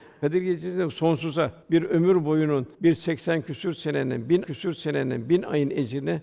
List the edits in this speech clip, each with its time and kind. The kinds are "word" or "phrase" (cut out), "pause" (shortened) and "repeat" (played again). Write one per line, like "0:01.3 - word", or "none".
0:01.6 - pause
0:02.7 - pause
0:04.4 - repeat